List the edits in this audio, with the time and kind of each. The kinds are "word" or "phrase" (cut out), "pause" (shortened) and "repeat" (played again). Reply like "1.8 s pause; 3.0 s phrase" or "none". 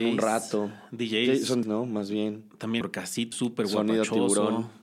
1.6 s word; 2.8 s word; 3.3 s word